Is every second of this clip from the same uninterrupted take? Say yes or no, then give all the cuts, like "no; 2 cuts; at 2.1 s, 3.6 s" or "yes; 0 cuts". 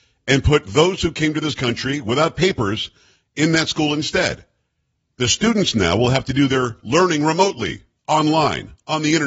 yes; 0 cuts